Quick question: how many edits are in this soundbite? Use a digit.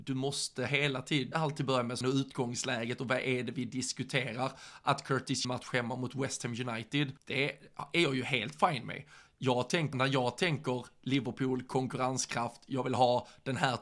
5